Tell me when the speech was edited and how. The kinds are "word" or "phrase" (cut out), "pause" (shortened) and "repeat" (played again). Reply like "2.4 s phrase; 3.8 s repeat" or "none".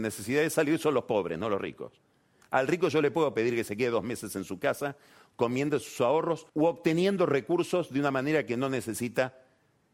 6.5 s pause